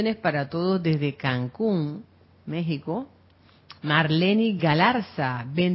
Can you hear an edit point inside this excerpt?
no; 0 cuts

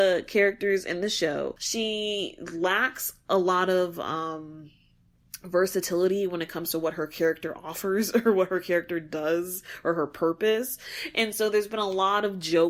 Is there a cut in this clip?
no; 0 cuts

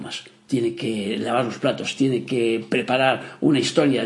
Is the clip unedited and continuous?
yes; 0 cuts

